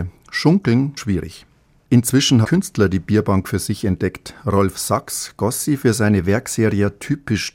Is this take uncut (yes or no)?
no